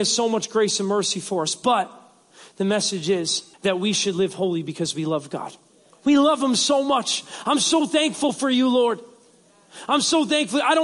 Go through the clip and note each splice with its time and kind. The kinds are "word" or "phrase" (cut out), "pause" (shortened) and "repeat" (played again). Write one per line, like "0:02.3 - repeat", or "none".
0:03.5 - pause
0:05.9 - pause